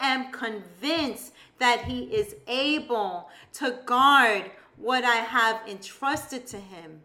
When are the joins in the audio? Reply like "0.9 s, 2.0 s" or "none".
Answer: none